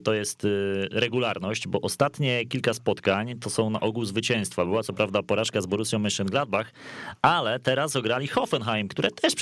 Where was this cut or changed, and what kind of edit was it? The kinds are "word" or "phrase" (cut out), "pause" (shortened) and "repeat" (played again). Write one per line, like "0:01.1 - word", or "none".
none